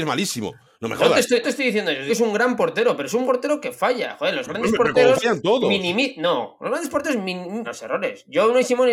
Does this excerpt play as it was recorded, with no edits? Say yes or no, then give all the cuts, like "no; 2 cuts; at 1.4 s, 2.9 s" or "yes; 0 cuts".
no; 4 cuts; at 1.4 s, 2.1 s, 3.2 s, 7.6 s